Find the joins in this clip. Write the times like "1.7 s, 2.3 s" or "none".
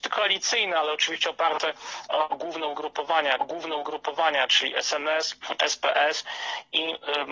3.4 s